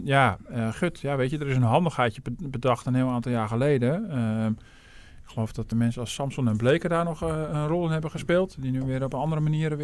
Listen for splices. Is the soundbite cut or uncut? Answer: cut